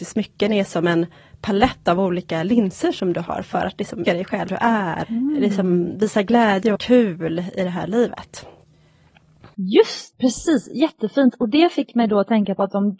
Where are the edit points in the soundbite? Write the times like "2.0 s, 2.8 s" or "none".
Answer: 4.1 s, 4.5 s, 5.0 s, 6.7 s, 10.1 s